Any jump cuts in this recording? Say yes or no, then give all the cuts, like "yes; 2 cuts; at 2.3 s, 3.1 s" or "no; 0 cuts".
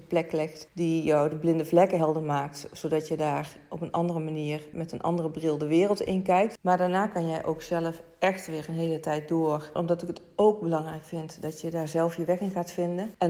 no; 0 cuts